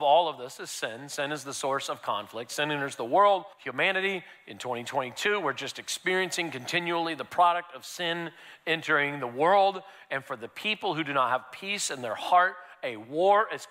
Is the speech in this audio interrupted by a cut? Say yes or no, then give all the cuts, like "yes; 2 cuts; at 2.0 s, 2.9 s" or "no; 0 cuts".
yes; 1 cut; at 3.5 s